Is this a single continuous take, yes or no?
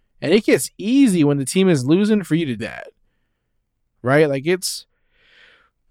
no